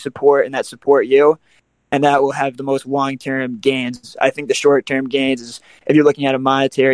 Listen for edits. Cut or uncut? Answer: uncut